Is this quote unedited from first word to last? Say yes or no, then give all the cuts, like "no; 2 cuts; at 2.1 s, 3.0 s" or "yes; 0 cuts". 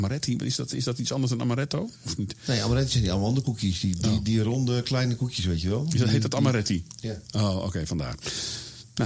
yes; 0 cuts